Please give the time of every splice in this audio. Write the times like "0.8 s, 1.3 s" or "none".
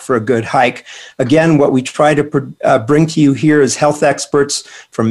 none